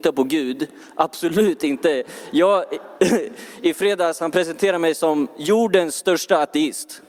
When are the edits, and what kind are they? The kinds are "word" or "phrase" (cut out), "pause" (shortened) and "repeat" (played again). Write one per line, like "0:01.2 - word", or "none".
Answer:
none